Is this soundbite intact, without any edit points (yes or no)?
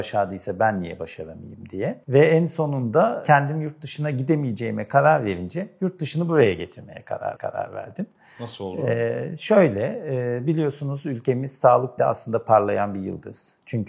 no